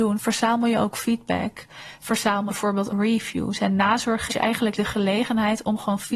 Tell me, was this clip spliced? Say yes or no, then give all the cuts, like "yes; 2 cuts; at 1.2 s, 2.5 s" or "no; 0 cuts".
yes; 4 cuts; at 2.5 s, 2.9 s, 4.3 s, 4.7 s